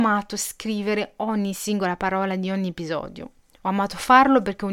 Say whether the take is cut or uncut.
uncut